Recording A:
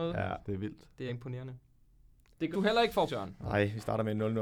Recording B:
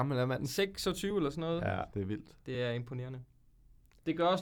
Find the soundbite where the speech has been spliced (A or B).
A